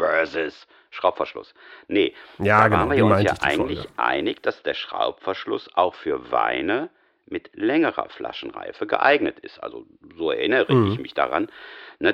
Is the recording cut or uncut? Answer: uncut